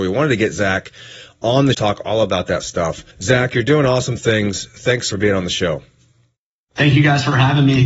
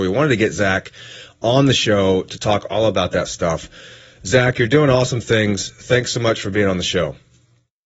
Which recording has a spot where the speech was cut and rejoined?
first; 3 cuts; at 1.7 s, 3.1 s, 5.1 s

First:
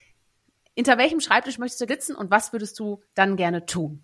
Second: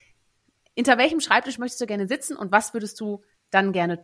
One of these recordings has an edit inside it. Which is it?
first; 2 cuts; at 1.9 s, 3.0 s

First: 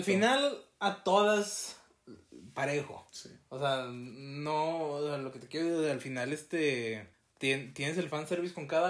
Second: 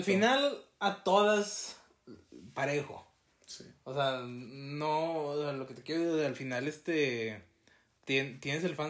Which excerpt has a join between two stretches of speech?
first; 2 cuts; at 3.1 s, 7.1 s

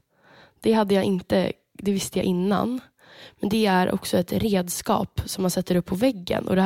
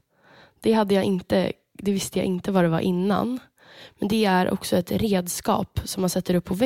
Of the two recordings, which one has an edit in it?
first; 1 cut; at 2.2 s

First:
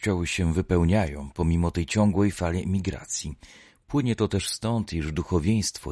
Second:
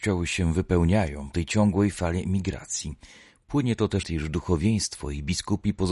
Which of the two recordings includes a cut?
second; 2 cuts; at 1.3 s, 4.0 s

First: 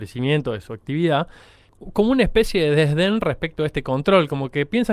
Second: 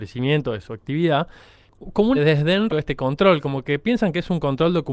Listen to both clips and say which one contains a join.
second; 2 cuts; at 2.1 s, 2.7 s

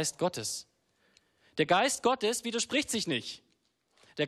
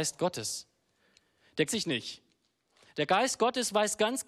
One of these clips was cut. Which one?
second; 1 cut; at 1.7 s

